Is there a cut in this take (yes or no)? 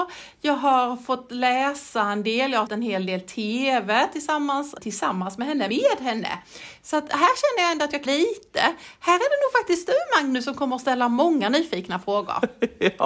yes